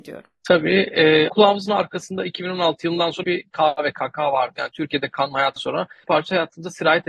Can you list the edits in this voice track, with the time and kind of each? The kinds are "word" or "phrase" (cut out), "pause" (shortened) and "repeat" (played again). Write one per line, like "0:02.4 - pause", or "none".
0:01.3 - word
0:03.2 - word
0:05.6 - word
0:06.0 - word